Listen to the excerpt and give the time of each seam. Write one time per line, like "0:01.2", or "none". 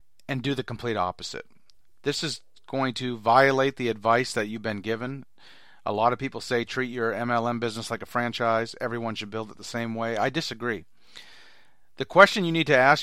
none